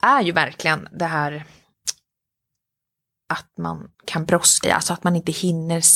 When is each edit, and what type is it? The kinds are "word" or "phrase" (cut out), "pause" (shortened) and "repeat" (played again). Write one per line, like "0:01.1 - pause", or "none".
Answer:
0:03.9 - pause
0:04.6 - word